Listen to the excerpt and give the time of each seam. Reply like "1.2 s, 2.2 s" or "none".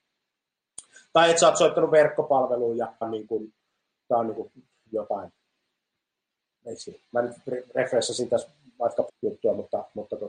3.0 s, 9.1 s